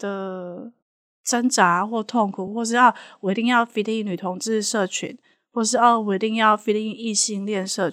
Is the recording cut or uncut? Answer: uncut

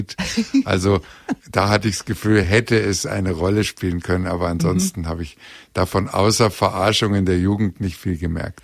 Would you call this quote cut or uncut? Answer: uncut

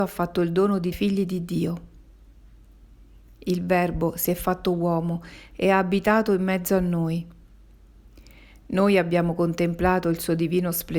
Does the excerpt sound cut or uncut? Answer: cut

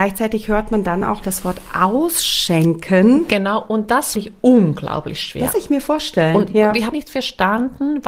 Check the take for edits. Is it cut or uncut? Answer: cut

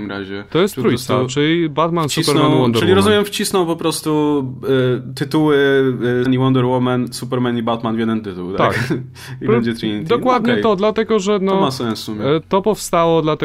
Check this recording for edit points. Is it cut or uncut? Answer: cut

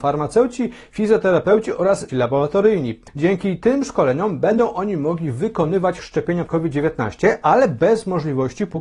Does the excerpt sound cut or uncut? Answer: cut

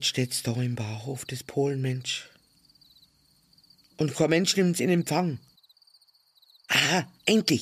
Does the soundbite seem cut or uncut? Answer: uncut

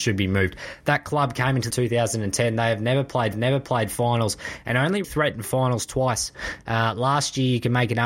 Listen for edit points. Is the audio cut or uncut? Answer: cut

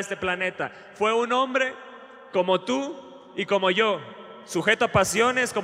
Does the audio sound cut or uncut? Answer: uncut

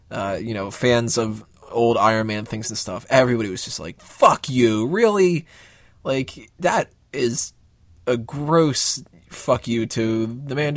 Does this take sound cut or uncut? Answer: uncut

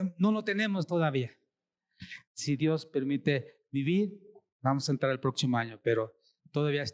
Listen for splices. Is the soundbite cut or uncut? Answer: uncut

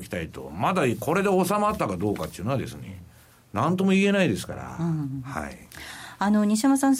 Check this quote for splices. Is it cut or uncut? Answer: uncut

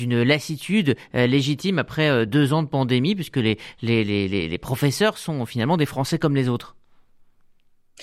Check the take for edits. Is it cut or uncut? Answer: uncut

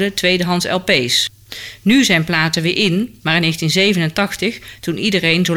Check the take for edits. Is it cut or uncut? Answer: uncut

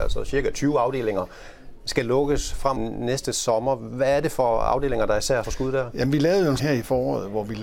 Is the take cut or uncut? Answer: cut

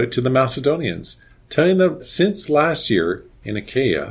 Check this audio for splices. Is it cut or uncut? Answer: cut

